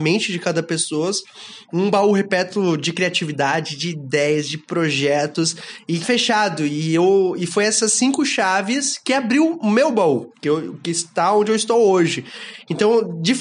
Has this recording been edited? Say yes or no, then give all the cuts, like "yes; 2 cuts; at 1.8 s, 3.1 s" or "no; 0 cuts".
yes; 2 cuts; at 6.0 s, 10.4 s